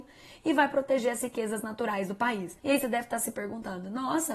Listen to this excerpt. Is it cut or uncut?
cut